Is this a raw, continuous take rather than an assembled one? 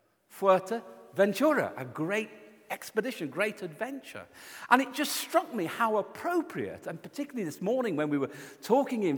yes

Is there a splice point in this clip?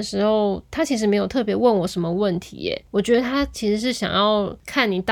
no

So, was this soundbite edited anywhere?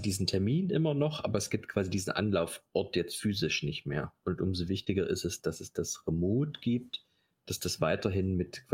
no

